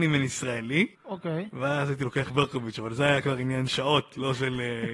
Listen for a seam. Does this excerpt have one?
yes; 3 cuts; at 0.9 s, 2.3 s, 3.7 s

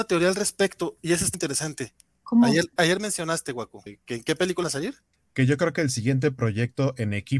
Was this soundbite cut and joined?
yes; 3 cuts; at 1.3 s, 2.8 s, 4.6 s

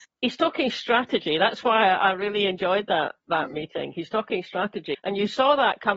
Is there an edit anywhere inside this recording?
yes; 1 cut; at 4.9 s

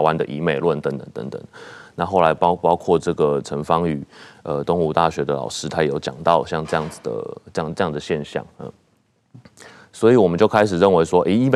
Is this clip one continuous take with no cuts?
yes; 0 cuts

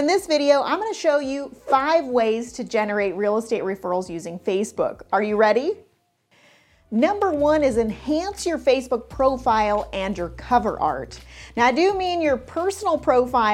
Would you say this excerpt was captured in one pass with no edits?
yes; 0 cuts

